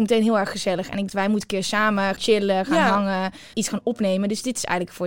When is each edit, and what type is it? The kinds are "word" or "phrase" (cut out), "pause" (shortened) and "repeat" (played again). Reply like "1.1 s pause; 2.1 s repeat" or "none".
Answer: 1.1 s word; 2.2 s word; 3.5 s word